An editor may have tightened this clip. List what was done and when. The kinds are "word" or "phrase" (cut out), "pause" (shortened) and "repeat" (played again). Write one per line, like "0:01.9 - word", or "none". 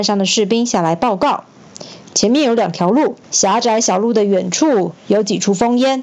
0:03.2 - pause